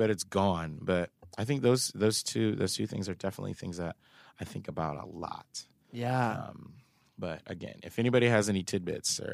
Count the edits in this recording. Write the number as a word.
zero